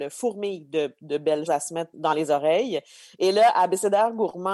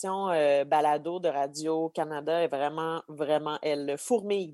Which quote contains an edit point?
first; 2 cuts; at 1.5 s, 1.9 s

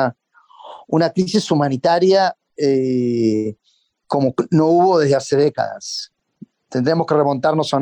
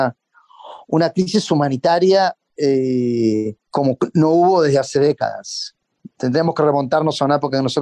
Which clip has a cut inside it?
second; 2 cuts; at 3.6 s, 6.1 s

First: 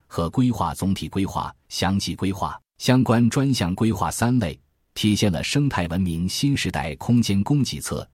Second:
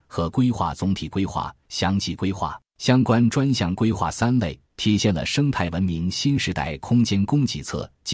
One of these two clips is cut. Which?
second; 1 cut; at 4.7 s

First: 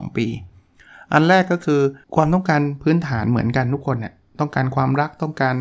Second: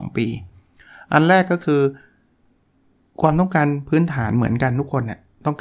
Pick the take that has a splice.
first; 1 cut; at 2.0 s

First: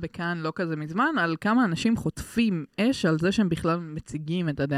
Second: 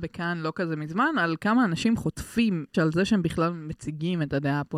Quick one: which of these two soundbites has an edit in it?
second; 1 cut; at 2.7 s

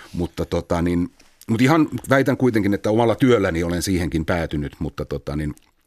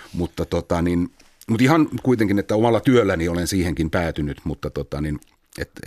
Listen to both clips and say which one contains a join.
second; 1 cut; at 2.0 s

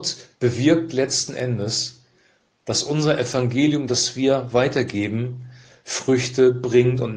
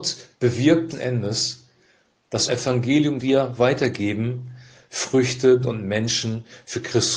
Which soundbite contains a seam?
second; 4 cuts; at 0.9 s, 2.5 s, 3.2 s, 5.6 s

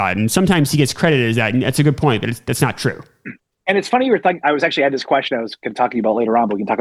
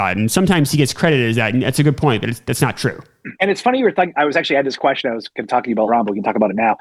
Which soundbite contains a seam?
second; 2 cuts; at 3.4 s, 5.9 s

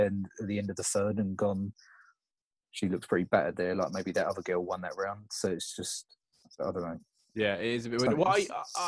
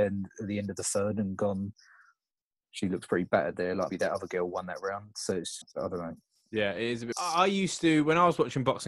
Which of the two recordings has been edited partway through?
second; 3 cuts; at 3.9 s, 5.6 s, 7.1 s

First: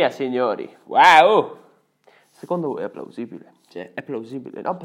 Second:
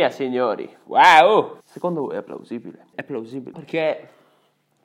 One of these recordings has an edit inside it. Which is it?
second; 3 cuts; at 1.6 s, 2.9 s, 3.5 s

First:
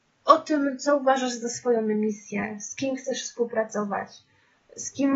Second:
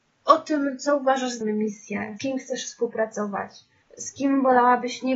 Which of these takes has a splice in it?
second; 3 cuts; at 1.4 s, 2.2 s, 3.8 s

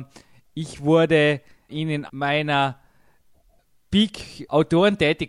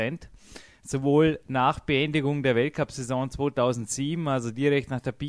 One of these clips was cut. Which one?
first; 2 cuts; at 1.7 s, 2.1 s

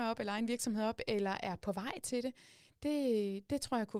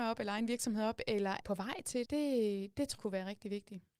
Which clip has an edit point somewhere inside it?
second; 3 cuts; at 1.4 s, 2.0 s, 3.0 s

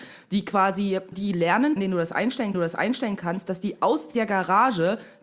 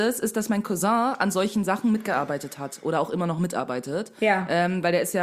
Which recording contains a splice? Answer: first; 3 cuts; at 1.1 s, 1.8 s, 2.5 s

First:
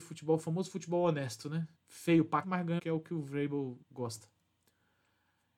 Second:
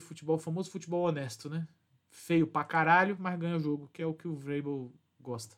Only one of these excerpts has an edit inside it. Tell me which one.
first; 4 cuts; at 1.8 s, 2.4 s, 2.8 s, 3.8 s

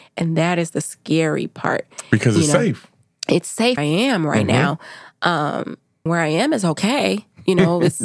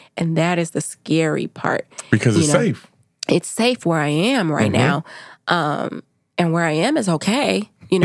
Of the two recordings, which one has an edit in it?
first; 2 cuts; at 3.8 s, 6.1 s

